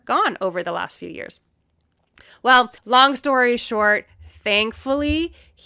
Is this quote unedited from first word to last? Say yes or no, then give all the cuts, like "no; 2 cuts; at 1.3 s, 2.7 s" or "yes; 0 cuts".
no; 1 cut; at 2.8 s